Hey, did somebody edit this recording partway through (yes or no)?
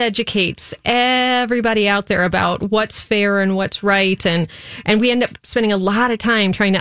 no